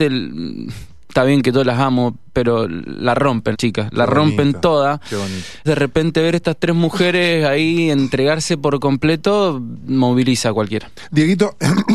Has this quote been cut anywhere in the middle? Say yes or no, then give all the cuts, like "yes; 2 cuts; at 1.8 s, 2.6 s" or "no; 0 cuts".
yes; 2 cuts; at 3.5 s, 5.7 s